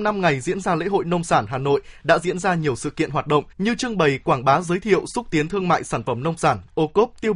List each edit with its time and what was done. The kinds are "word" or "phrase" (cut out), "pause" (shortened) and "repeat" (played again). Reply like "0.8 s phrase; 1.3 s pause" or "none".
3.5 s pause

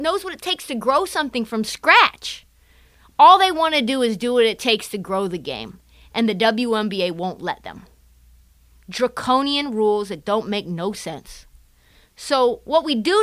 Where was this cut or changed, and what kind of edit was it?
none

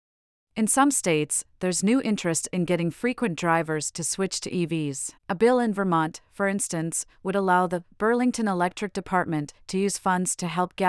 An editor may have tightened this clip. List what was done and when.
5.2 s pause

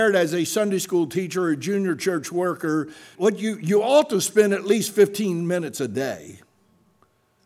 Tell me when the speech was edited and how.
3.1 s word

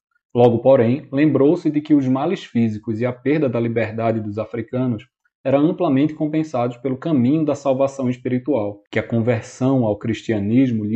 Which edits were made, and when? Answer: 8.9 s pause

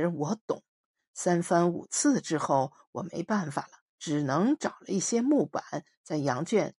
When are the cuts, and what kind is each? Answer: 3.9 s pause

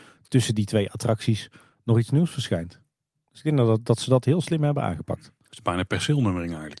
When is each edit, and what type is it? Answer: none

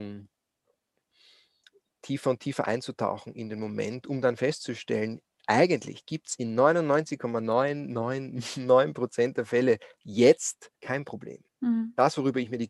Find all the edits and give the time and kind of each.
10.8 s pause; 11.5 s pause

